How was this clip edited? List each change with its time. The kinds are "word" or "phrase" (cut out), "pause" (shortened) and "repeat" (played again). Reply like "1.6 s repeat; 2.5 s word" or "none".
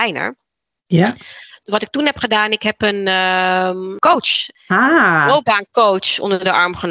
none

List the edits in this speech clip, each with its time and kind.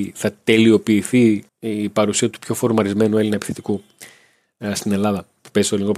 1.5 s pause; 2.3 s phrase

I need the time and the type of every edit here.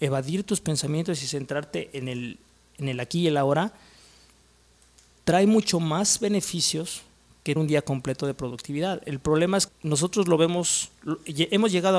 7.6 s word; 9.7 s word

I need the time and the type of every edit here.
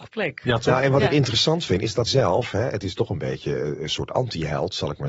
2.1 s word

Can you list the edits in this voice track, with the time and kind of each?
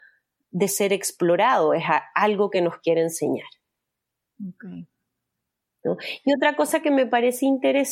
none

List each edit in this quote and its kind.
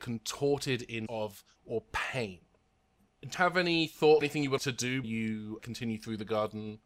1.1 s word; 1.6 s word; 3.3 s word; 4.2 s word; 4.6 s word; 5.0 s word; 5.6 s word

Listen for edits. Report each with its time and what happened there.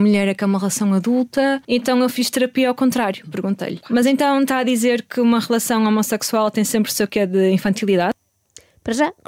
none

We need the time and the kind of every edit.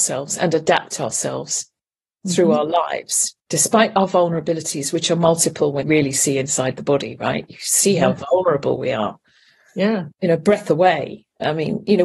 3.4 s pause; 5.8 s word; 10.1 s pause

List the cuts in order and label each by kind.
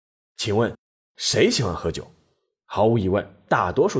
none

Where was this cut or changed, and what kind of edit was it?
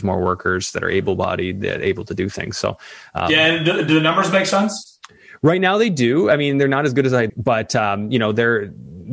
7.3 s word

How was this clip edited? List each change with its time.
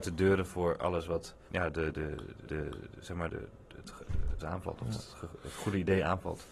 1.5 s word; 2.5 s repeat; 3.3 s word; 4.4 s phrase

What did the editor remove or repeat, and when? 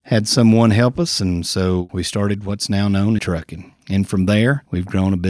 3.2 s phrase

